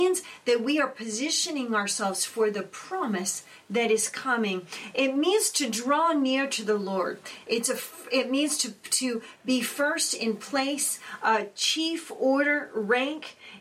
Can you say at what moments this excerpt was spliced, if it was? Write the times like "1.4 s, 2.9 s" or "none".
none